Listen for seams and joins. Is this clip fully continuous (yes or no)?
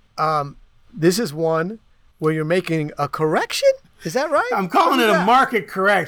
yes